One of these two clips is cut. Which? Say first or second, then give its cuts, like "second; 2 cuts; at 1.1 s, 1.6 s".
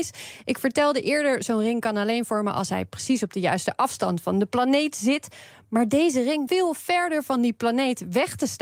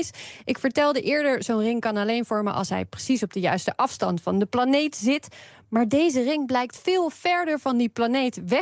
first; 1 cut; at 6.5 s